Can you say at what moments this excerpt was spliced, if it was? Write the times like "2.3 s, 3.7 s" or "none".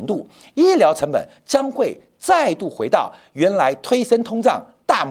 none